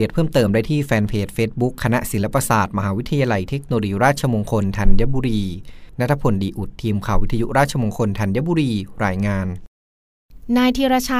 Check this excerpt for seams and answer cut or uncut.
uncut